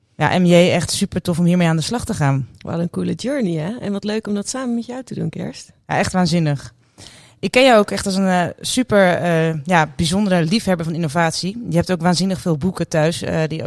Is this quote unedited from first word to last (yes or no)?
yes